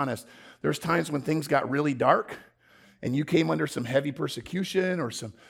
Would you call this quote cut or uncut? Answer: uncut